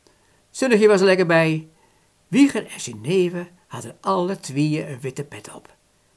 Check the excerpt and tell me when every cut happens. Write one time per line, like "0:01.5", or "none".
none